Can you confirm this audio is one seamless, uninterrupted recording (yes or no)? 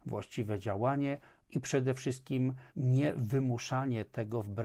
no